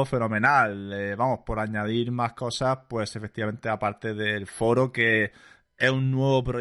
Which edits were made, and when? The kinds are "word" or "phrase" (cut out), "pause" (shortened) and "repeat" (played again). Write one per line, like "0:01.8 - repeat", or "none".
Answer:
none